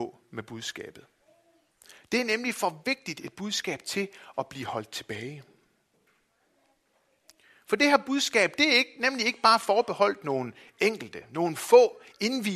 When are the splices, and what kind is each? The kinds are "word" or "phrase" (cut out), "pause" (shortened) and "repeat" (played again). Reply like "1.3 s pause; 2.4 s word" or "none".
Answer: none